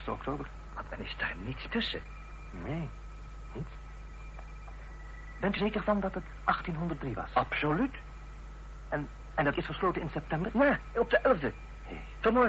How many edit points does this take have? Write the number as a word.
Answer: three